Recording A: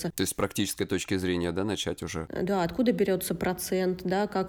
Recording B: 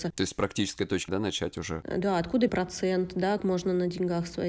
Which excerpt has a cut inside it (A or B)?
B